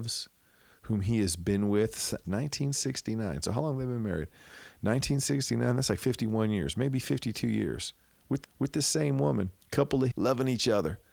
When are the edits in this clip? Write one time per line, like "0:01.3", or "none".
0:02.2
0:08.4
0:09.6
0:10.1